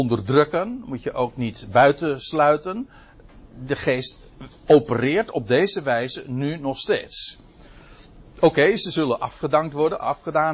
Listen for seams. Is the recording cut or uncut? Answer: uncut